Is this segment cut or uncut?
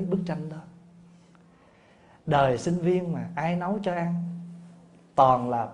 uncut